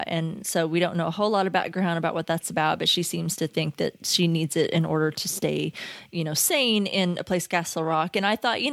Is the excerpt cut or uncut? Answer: uncut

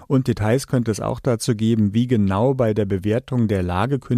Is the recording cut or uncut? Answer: uncut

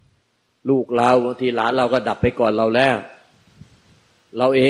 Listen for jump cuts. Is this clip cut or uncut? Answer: uncut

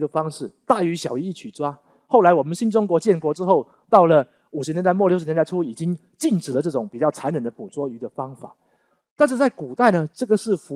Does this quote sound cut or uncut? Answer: uncut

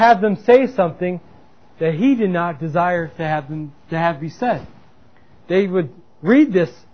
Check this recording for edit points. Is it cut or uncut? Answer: uncut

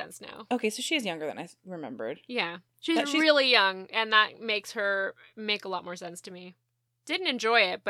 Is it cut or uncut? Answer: uncut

